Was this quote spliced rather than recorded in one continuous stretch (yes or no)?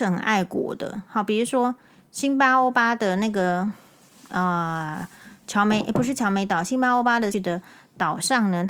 yes